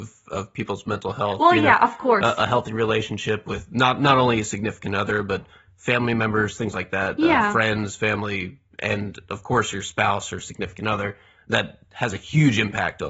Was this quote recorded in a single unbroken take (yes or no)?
yes